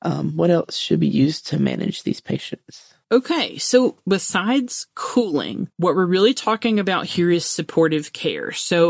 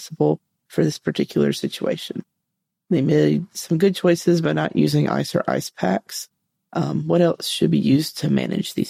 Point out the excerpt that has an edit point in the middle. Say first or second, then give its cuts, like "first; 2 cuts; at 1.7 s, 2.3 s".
first; 2 cuts; at 3.0 s, 5.7 s